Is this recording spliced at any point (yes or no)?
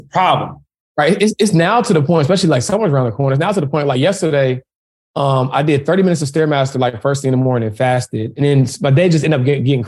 no